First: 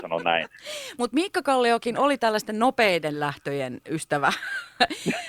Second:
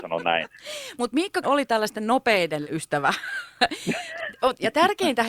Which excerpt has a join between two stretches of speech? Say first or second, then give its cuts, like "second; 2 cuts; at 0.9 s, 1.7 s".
second; 2 cuts; at 1.4 s, 2.6 s